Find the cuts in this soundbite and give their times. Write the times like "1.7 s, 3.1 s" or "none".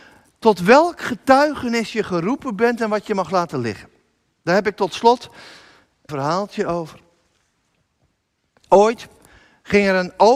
6.1 s